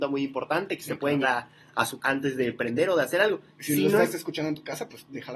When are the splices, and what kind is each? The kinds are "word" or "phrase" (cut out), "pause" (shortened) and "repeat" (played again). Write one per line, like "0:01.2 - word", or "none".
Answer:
0:01.2 - word
0:02.0 - word